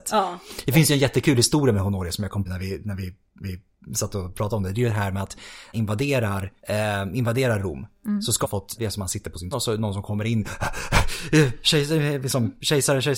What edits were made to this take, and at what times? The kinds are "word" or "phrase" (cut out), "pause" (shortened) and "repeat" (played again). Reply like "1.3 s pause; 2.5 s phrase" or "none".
2.5 s phrase; 3.4 s repeat; 5.7 s phrase; 6.6 s pause; 8.4 s word; 8.8 s phrase; 9.5 s word